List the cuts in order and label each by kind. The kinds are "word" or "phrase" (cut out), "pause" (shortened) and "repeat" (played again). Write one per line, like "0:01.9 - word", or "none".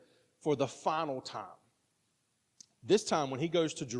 none